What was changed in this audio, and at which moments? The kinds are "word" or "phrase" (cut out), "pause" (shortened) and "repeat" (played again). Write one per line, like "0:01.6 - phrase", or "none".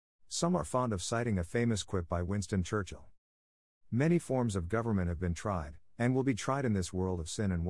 none